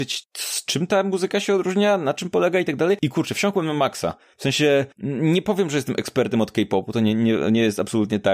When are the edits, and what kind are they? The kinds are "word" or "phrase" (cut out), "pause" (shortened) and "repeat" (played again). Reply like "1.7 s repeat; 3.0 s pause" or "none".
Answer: 4.9 s pause

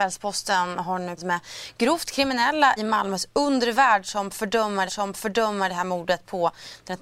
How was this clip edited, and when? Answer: 1.2 s word; 2.8 s word; 4.9 s repeat

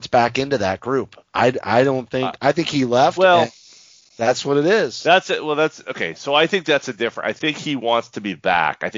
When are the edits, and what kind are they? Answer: none

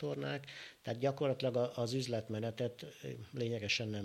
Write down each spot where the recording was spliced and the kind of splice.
none

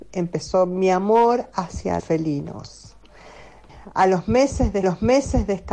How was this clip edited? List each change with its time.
2.0 s word; 4.8 s repeat

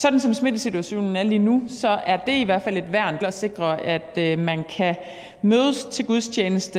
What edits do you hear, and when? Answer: 3.2 s word

